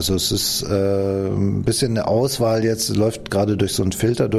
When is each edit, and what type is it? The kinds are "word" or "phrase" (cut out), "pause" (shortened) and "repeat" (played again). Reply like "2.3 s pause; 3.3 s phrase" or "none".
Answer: none